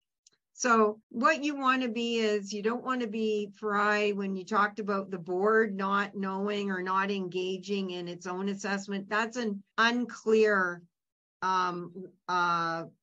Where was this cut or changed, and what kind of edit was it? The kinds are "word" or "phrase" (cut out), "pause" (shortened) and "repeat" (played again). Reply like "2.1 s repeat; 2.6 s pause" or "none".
1.0 s pause; 9.7 s pause